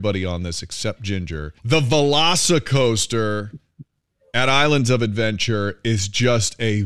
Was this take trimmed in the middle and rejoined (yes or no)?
yes